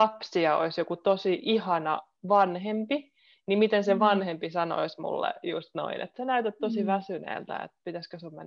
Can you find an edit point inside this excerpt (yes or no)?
no